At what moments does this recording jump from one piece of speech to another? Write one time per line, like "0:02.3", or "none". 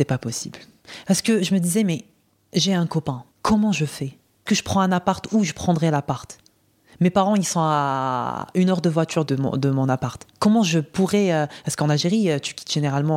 0:03.3
0:04.5
0:09.3
0:10.3